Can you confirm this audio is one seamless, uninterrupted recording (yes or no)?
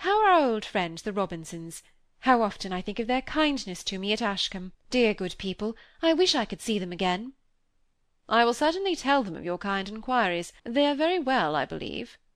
no